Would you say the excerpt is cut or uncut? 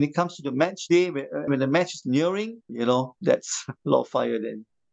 cut